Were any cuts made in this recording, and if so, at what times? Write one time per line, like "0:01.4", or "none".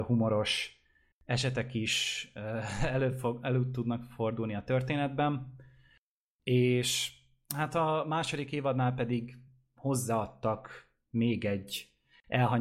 none